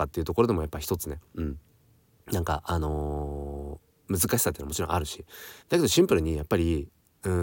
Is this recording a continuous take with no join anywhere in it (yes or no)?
no